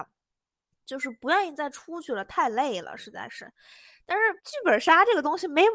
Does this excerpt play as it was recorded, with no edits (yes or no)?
no